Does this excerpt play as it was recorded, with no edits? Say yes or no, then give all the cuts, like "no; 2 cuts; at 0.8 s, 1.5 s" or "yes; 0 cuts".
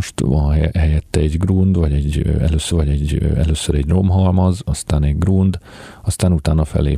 no; 1 cut; at 2.7 s